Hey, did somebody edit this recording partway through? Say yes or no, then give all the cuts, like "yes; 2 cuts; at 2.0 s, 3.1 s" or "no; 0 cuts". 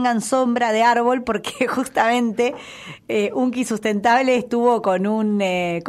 no; 0 cuts